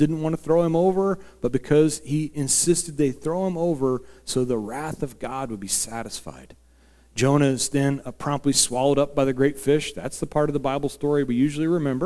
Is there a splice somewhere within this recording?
no; 0 cuts

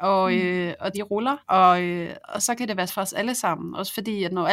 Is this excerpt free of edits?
no; 4 cuts; at 0.9 s, 1.4 s, 2.2 s, 2.9 s

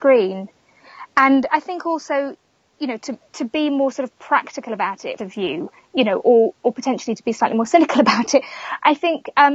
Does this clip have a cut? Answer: yes; 3 cuts; at 2.7 s, 3.2 s, 5.2 s

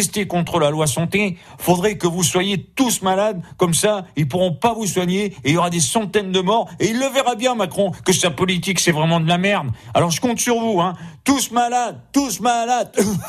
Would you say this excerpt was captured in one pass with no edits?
yes; 0 cuts

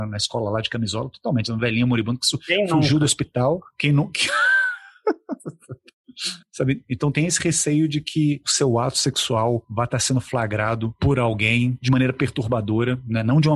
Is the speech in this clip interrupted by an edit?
no; 0 cuts

